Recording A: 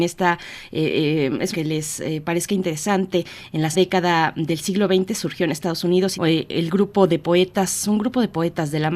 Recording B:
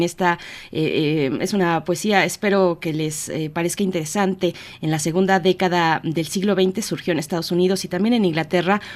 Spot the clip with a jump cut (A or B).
A